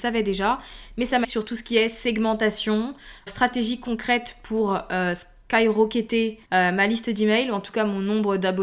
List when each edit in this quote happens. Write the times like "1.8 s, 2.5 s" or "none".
1.2 s, 3.3 s, 6.4 s